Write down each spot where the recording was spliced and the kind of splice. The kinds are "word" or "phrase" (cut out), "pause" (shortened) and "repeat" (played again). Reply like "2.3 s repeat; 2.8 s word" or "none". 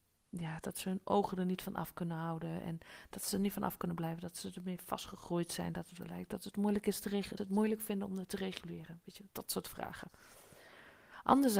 7.4 s phrase; 9.3 s pause